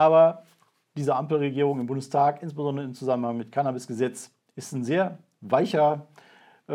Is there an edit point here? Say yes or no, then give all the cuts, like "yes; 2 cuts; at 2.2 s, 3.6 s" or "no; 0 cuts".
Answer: no; 0 cuts